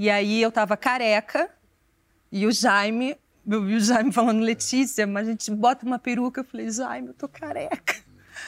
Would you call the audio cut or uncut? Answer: uncut